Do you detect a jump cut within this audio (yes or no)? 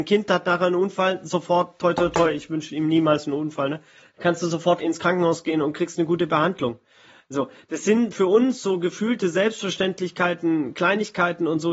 no